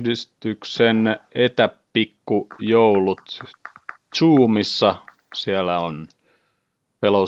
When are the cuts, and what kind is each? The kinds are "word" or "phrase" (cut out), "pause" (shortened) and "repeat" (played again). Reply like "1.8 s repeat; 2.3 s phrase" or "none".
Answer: 4.1 s word